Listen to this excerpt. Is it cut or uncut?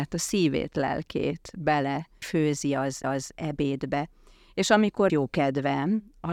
cut